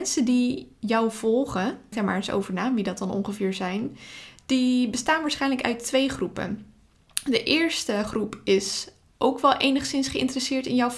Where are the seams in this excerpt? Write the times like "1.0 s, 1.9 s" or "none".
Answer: 1.9 s